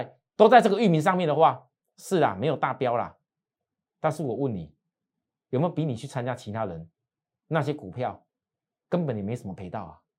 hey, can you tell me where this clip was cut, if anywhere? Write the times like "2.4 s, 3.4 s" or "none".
none